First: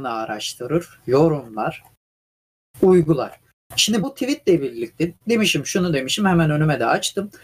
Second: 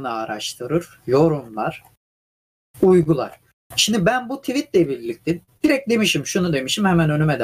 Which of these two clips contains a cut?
first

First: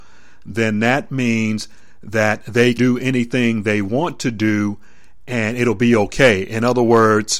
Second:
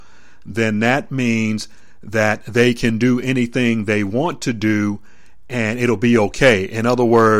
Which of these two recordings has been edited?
first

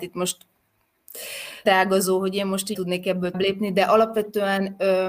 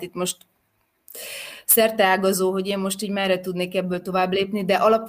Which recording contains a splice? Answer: first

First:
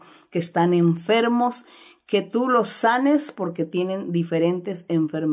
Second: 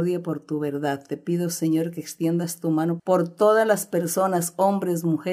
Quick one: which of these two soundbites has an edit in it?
second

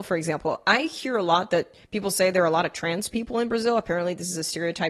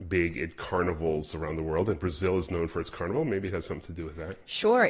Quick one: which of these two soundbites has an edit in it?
first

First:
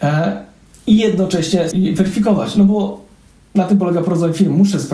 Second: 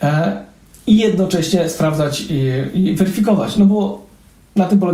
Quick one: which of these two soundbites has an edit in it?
first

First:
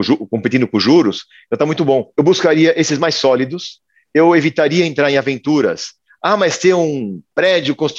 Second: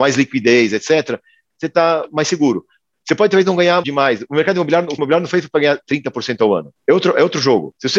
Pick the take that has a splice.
second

